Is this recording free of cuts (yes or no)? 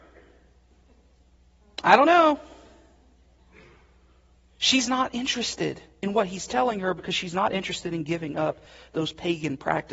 yes